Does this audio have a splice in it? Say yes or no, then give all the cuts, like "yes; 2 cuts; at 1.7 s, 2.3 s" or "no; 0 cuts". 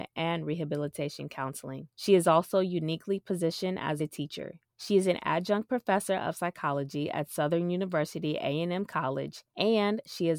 yes; 4 cuts; at 1.9 s, 4.0 s, 4.7 s, 9.5 s